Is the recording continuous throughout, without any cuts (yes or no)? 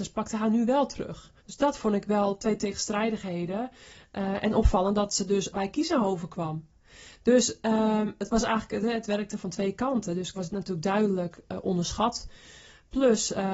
no